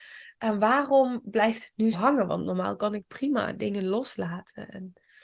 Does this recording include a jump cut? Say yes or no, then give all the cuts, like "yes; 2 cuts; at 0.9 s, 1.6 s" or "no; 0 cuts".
yes; 1 cut; at 1.9 s